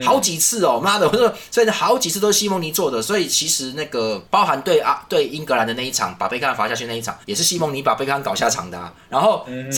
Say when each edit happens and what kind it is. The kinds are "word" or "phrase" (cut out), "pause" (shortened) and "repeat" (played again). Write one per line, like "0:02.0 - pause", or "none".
0:07.2 - pause